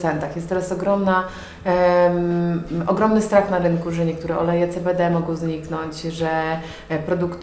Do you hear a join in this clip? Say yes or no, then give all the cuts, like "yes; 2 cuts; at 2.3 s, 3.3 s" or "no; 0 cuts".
no; 0 cuts